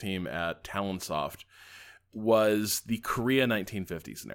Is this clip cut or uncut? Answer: uncut